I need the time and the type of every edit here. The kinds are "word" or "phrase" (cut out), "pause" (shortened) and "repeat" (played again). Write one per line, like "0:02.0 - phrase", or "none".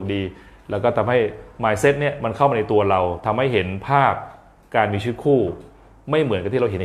none